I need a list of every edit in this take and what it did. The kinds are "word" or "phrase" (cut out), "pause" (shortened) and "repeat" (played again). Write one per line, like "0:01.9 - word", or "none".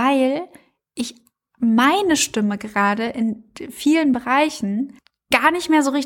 none